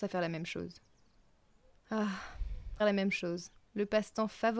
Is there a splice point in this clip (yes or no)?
yes